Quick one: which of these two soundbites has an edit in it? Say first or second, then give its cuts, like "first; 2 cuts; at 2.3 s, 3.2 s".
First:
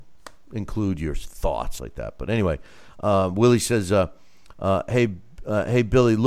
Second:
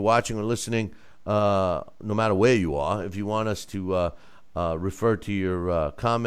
first; 1 cut; at 1.8 s